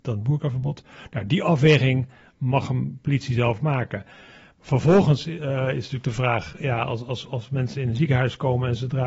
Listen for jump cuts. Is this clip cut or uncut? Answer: uncut